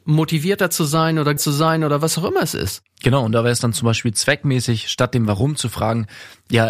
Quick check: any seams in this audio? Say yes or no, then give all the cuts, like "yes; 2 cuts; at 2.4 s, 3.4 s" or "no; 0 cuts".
yes; 1 cut; at 1.4 s